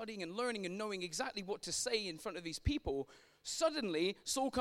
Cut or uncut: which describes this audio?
uncut